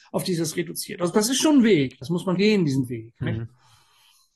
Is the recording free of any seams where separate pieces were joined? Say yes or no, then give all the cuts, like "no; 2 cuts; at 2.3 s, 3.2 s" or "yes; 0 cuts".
no; 1 cut; at 2.4 s